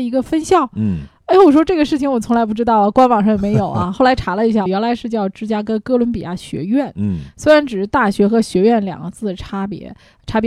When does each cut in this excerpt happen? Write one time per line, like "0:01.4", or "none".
0:04.7